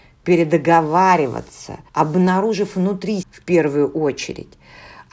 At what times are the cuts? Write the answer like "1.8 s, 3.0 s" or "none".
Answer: 1.9 s, 3.2 s